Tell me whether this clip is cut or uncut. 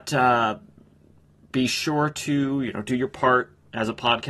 uncut